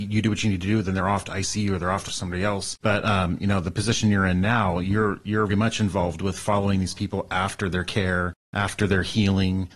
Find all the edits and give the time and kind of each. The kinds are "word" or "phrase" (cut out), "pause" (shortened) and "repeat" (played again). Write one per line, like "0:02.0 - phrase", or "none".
0:02.1 - phrase
0:02.8 - pause
0:05.5 - word
0:08.4 - pause